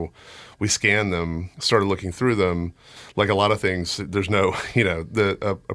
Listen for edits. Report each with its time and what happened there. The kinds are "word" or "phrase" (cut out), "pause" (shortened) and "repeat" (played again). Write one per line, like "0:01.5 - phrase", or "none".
0:01.5 - pause